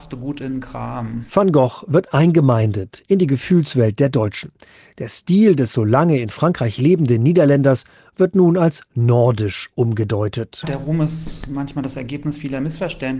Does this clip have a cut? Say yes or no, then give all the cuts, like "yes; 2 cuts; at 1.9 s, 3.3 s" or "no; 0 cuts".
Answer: no; 0 cuts